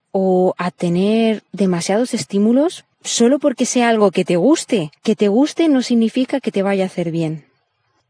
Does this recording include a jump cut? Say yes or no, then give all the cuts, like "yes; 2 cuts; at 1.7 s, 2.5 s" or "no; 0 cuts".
yes; 3 cuts; at 1.5 s, 2.9 s, 5.0 s